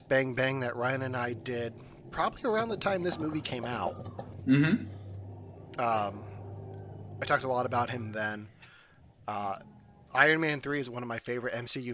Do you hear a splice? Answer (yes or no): no